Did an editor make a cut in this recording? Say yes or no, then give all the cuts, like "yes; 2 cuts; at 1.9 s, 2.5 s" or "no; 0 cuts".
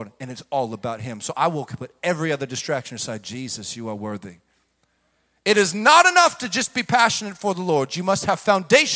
no; 0 cuts